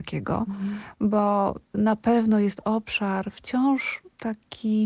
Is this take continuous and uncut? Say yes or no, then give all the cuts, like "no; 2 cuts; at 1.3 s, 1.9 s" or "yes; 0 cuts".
no; 1 cut; at 1.7 s